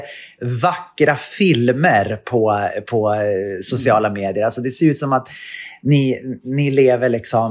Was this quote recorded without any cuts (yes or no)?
yes